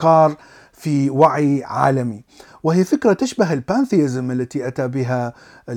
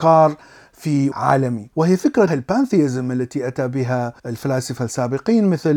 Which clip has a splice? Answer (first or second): second